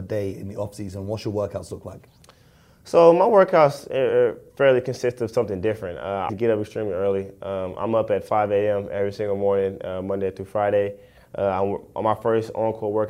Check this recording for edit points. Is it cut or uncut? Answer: cut